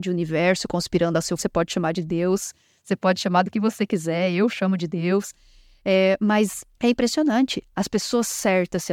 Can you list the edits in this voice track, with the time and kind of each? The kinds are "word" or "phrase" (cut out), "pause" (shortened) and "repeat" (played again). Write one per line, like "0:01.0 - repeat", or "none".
0:01.4 - word
0:06.7 - pause